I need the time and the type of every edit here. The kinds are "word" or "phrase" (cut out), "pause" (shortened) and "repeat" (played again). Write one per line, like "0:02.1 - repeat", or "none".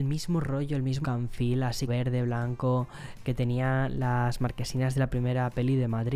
0:01.0 - word
0:01.9 - word
0:03.2 - word